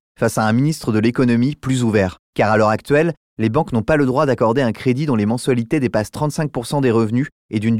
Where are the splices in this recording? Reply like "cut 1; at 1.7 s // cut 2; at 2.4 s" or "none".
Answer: cut 1; at 2.2 s